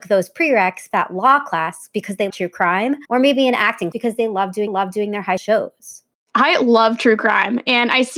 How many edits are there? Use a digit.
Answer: 7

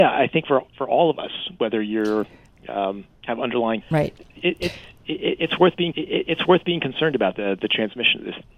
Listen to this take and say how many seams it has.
3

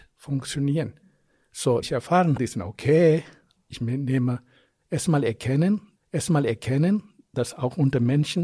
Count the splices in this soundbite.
3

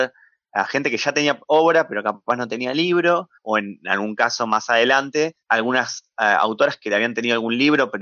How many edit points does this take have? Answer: 2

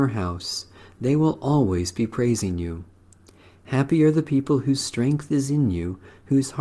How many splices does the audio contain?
0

